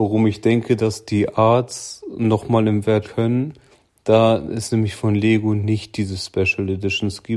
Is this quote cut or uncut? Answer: cut